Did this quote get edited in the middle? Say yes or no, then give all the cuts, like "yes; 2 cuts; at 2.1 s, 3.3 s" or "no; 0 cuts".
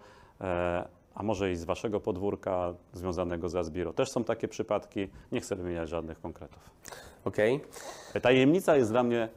no; 0 cuts